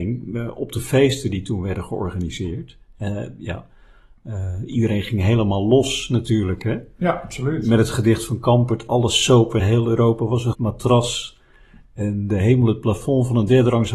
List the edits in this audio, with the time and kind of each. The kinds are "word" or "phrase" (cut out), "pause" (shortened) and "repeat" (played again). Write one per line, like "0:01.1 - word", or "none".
0:09.6 - word
0:10.5 - word